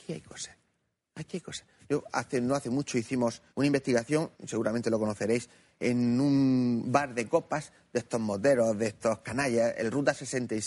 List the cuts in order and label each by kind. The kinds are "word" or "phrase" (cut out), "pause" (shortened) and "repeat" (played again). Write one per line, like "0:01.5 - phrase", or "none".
0:03.5 - pause
0:04.3 - pause

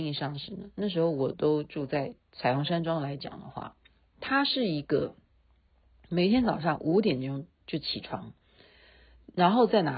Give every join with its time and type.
none

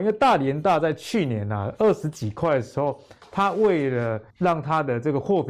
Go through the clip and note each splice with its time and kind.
0:04.3 - pause

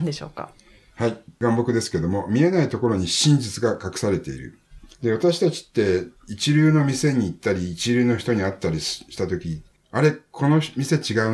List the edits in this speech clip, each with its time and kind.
0:04.9 - pause
0:06.2 - pause
0:09.8 - phrase

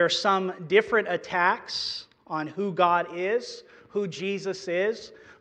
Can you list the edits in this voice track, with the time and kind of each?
none

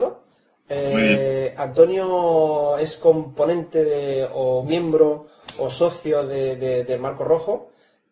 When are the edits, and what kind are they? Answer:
none

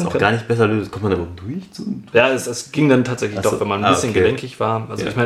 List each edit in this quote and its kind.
none

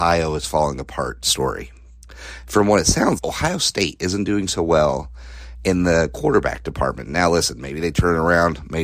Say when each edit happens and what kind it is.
0:03.2 - word

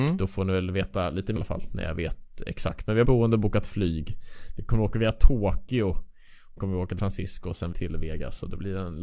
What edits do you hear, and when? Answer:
0:01.4 - word
0:03.0 - word
0:06.6 - word
0:07.0 - word
0:07.7 - word

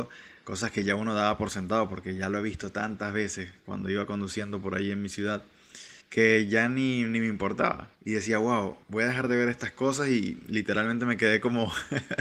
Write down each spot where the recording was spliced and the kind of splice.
0:03.6 - pause
0:06.0 - pause
0:07.9 - pause
0:08.8 - pause

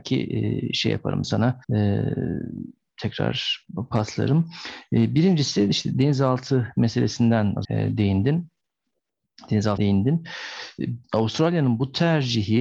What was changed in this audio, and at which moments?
0:01.2 - phrase
0:01.6 - pause
0:07.6 - word
0:09.8 - word
0:11.0 - pause

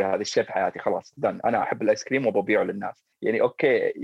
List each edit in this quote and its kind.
0:03.1 - pause

